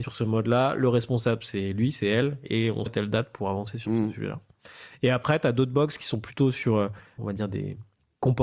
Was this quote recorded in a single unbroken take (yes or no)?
no